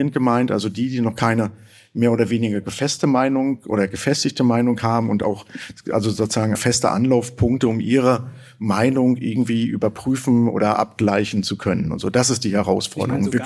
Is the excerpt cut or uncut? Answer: cut